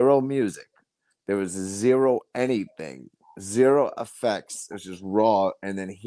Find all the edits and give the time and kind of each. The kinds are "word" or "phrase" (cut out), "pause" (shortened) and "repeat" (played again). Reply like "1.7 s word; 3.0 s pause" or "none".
none